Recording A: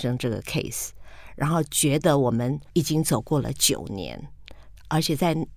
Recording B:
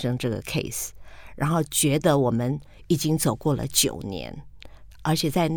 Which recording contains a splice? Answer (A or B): A